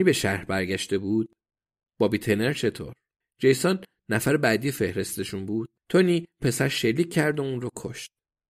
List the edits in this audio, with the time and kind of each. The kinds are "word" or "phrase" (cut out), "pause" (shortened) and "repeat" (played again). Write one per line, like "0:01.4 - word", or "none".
0:03.2 - pause
0:05.8 - pause
0:06.4 - word